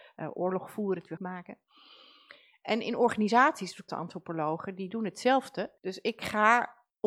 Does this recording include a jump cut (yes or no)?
yes